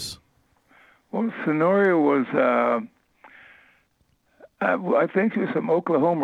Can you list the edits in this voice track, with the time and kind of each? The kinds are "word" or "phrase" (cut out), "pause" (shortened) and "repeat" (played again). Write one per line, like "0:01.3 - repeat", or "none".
none